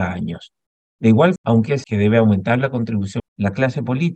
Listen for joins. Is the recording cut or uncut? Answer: cut